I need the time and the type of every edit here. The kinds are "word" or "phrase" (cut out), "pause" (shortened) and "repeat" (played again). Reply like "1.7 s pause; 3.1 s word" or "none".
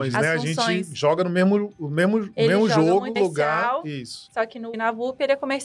3.2 s phrase; 4.7 s word

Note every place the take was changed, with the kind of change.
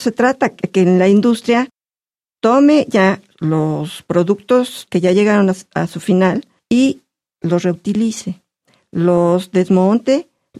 none

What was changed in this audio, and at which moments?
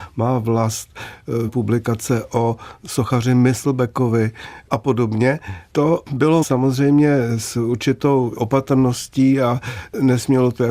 1.5 s word; 6.4 s word; 8.4 s word

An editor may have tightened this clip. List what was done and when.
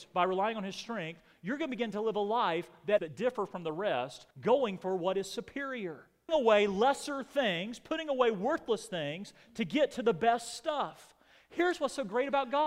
3.0 s phrase; 4.3 s pause; 6.3 s word

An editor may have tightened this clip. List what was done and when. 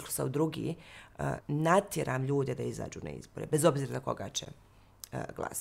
1.4 s word

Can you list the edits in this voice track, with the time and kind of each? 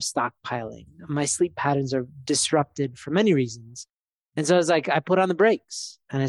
none

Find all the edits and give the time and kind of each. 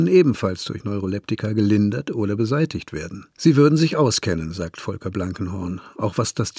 3.3 s pause

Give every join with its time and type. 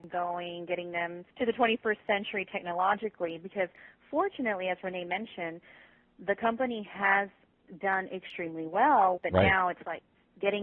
1.3 s pause; 9.2 s phrase

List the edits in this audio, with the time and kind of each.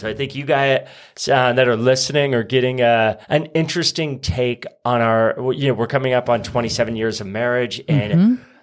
3.2 s pause

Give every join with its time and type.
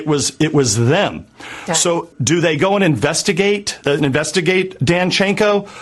2.1 s word; 3.8 s word

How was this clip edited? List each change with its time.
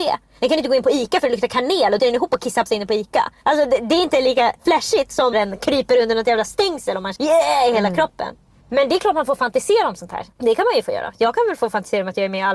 2.0 s word; 2.7 s word; 5.3 s word; 7.2 s word

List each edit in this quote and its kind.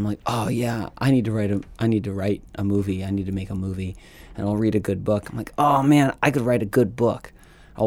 none

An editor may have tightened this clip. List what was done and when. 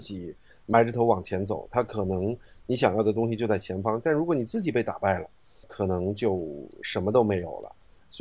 5.6 s word

